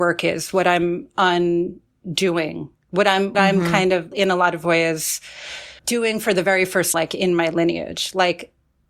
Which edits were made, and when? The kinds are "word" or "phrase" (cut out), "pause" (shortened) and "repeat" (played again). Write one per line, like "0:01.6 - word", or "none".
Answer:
0:03.3 - word
0:04.1 - word
0:05.8 - pause
0:06.9 - word